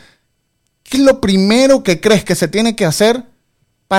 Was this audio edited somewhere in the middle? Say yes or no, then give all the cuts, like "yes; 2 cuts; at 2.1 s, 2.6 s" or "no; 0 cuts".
yes; 1 cut; at 0.9 s